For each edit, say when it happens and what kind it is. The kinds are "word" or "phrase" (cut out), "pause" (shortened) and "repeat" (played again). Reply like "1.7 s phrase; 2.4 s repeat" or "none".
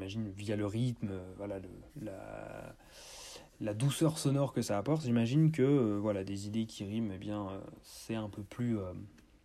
1.9 s pause